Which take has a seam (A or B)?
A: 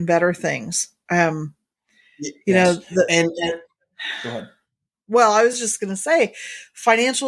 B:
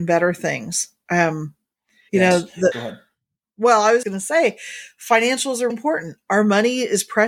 B